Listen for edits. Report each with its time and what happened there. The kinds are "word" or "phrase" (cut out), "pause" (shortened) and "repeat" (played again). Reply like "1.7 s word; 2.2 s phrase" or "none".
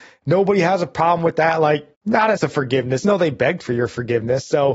1.9 s pause; 2.4 s word; 3.0 s word